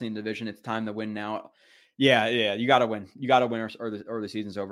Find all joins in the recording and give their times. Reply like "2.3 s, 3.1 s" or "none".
none